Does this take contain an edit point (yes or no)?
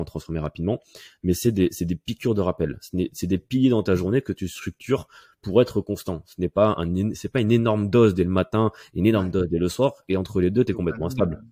no